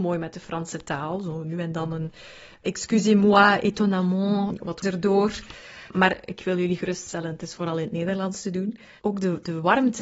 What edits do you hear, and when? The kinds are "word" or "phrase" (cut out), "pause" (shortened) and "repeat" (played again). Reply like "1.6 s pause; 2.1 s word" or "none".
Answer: 2.6 s word; 4.8 s word